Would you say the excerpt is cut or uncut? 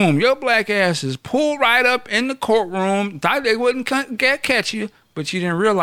uncut